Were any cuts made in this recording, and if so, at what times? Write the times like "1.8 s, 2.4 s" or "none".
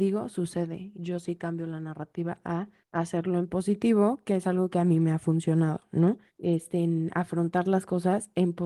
0.9 s, 2.8 s, 6.3 s